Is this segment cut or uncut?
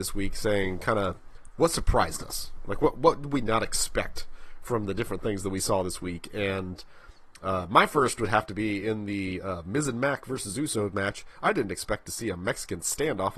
uncut